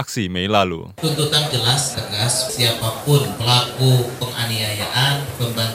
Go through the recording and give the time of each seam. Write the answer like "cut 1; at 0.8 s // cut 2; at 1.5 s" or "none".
cut 1; at 1.5 s // cut 2; at 1.9 s // cut 3; at 2.5 s